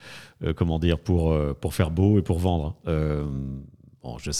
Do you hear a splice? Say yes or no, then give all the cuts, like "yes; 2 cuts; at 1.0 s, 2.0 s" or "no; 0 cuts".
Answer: no; 0 cuts